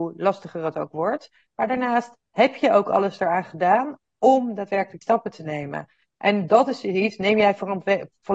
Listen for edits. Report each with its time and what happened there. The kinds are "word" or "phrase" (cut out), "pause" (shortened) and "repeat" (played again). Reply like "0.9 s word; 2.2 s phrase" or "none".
5.0 s word